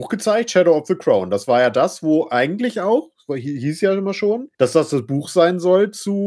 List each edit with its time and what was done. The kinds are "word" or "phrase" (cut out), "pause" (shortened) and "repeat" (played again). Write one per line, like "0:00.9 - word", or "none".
0:04.5 - pause